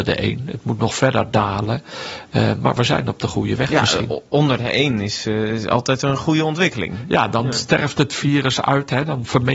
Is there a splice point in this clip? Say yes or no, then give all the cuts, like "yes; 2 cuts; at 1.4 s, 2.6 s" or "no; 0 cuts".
no; 0 cuts